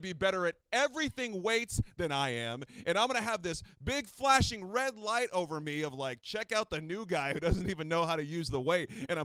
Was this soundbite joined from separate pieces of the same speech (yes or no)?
no